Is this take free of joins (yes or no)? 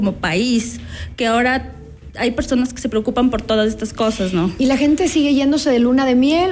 yes